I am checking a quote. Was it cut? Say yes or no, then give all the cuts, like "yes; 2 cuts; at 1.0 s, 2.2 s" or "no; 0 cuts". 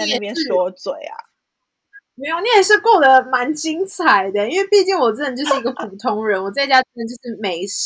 yes; 1 cut; at 2.1 s